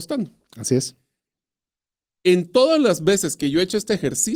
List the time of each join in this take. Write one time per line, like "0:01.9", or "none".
none